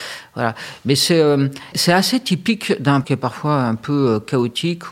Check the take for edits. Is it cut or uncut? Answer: cut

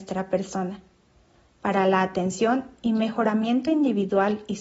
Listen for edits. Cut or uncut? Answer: uncut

